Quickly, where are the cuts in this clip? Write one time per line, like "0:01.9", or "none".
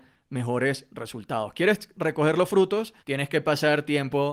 0:03.0